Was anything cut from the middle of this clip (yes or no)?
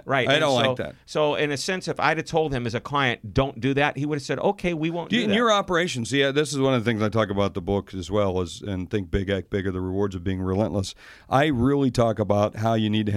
no